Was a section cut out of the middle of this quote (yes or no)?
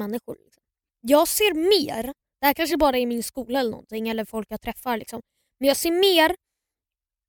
no